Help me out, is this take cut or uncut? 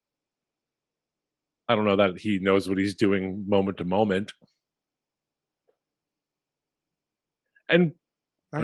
uncut